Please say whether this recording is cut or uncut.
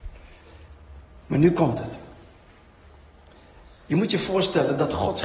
uncut